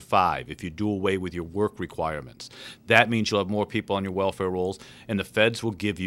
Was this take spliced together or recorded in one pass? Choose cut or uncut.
uncut